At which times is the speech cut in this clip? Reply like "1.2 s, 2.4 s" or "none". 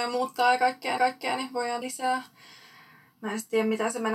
1.0 s, 1.8 s